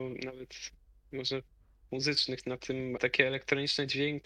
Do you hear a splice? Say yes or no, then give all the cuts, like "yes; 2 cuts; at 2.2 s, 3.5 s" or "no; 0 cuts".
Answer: yes; 2 cuts; at 1.9 s, 3.0 s